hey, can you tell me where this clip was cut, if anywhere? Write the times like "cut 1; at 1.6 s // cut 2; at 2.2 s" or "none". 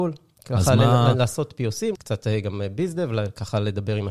cut 1; at 1.9 s